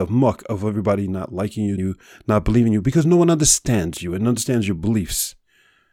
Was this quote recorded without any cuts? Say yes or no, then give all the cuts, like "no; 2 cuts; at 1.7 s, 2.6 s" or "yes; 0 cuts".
no; 1 cut; at 1.8 s